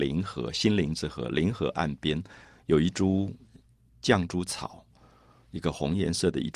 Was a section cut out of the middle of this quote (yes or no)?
no